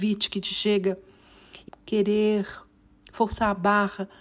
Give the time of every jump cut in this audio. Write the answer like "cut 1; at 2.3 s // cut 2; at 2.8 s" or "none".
cut 1; at 1.7 s